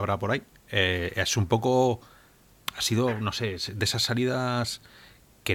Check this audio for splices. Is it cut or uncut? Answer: uncut